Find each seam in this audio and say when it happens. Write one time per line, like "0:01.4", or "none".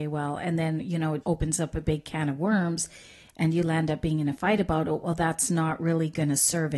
0:01.2

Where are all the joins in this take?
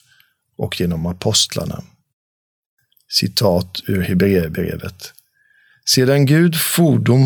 none

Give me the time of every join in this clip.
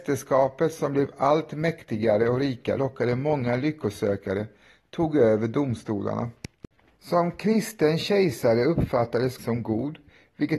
0:02.8
0:09.4

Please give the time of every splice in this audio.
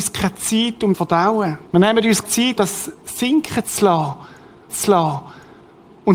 0:00.9
0:01.7
0:02.2
0:02.6
0:04.7

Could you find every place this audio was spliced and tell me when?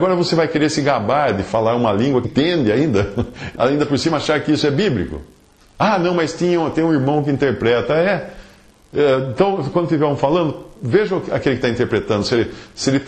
0:02.2
0:03.6
0:09.7

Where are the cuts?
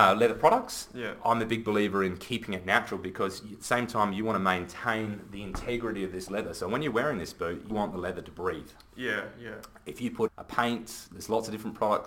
0:07.7
0:10.3

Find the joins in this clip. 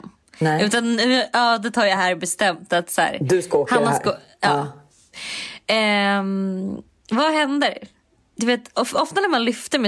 none

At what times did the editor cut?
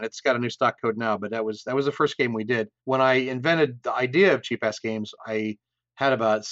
0:02.8

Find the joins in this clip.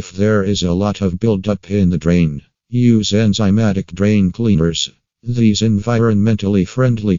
none

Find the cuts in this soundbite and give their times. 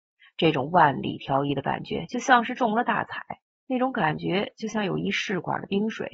0:03.5

